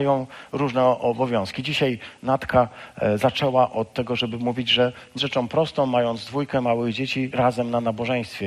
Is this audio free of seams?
no; 2 cuts; at 5.2 s, 7.3 s

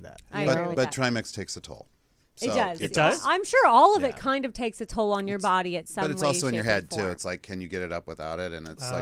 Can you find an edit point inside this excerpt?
no; 0 cuts

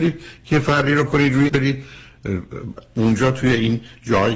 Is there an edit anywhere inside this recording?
yes; 2 cuts; at 1.1 s, 1.5 s

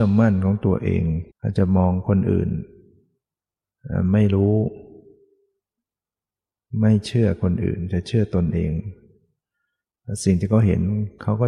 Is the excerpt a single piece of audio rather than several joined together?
no; 1 cut; at 1.3 s

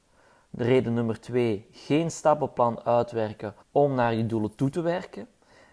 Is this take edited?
yes; 1 cut; at 3.6 s

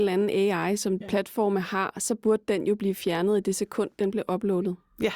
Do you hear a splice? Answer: yes; 1 cut; at 1.0 s

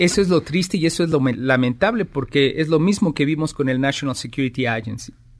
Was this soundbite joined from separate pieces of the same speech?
no; 0 cuts

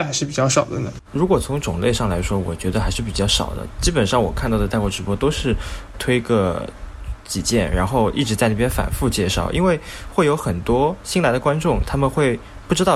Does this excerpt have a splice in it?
yes; 1 cut; at 5.9 s

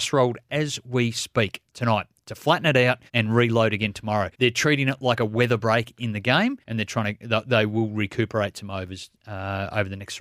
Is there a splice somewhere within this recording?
yes; 4 cuts; at 1.6 s, 3.1 s, 4.3 s, 6.6 s

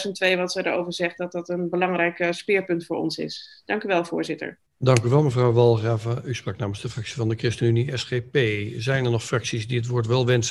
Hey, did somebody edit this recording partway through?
yes; 1 cut; at 4.7 s

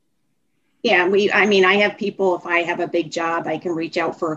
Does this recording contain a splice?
no; 0 cuts

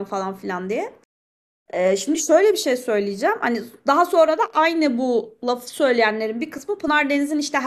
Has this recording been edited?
no; 0 cuts

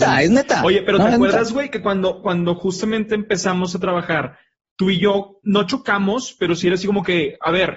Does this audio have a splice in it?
no; 0 cuts

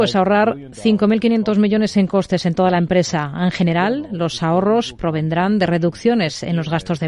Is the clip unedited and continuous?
yes; 0 cuts

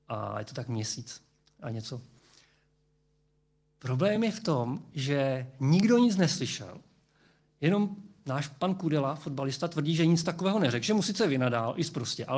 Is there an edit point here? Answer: no; 0 cuts

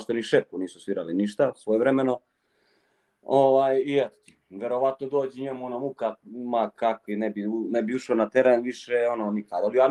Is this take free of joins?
yes; 0 cuts

